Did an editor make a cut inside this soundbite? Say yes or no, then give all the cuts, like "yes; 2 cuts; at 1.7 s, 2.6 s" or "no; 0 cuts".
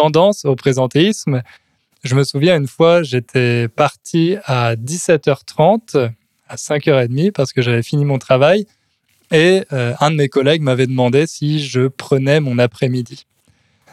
no; 0 cuts